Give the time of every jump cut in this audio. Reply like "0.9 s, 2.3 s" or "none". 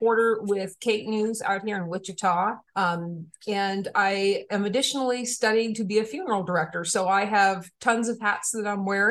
2.7 s